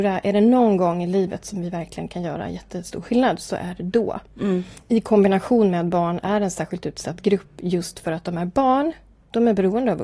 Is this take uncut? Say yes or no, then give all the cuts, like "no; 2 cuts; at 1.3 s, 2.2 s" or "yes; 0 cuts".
yes; 0 cuts